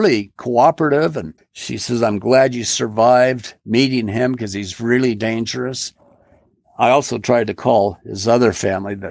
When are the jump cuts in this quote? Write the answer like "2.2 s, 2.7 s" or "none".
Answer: 1.4 s